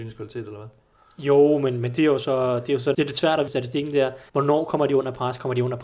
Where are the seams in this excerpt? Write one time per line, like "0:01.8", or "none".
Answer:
0:02.0
0:02.9
0:03.5
0:04.3